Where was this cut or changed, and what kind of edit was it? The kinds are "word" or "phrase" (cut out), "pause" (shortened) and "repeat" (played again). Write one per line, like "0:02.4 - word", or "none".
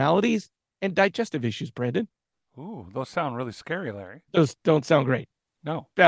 0:02.3 - pause
0:04.3 - pause